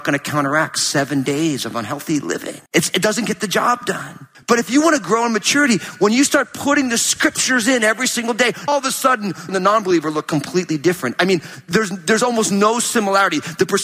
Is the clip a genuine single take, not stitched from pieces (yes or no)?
no